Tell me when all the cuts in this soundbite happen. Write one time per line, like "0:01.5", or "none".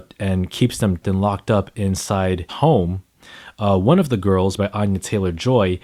0:01.0
0:02.5
0:04.6